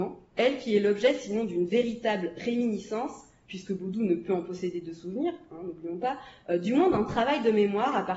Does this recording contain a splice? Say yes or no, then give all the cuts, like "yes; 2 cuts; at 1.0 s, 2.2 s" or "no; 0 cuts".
no; 0 cuts